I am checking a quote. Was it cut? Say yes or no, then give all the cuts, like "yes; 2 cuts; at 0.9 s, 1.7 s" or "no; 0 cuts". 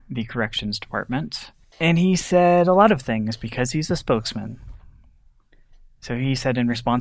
no; 0 cuts